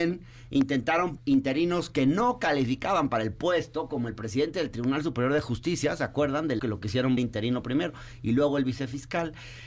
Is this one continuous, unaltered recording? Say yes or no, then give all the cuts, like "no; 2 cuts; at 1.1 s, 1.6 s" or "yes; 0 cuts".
no; 3 cuts; at 1.2 s, 6.6 s, 7.2 s